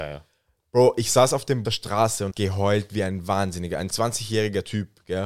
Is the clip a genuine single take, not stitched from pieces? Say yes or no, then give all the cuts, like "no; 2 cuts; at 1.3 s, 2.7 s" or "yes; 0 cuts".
no; 2 cuts; at 1.7 s, 2.3 s